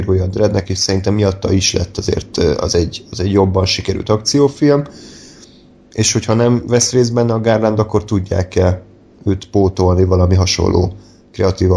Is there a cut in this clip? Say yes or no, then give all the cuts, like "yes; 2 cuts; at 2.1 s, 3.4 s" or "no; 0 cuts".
no; 0 cuts